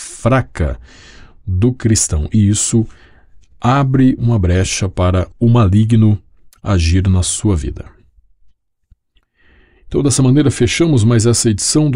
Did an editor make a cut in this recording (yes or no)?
yes